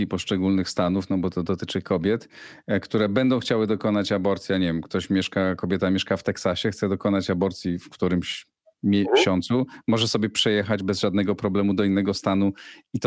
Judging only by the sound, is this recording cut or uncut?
uncut